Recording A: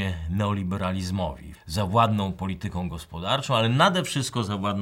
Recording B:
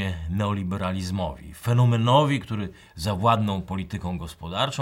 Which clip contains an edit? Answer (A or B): A